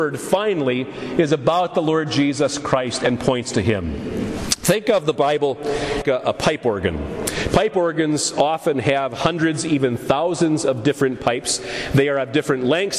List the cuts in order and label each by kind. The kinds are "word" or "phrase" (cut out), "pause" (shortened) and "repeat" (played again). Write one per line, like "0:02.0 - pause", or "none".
0:06.0 - word